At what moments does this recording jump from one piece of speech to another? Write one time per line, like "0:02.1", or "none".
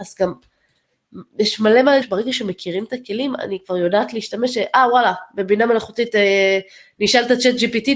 0:02.0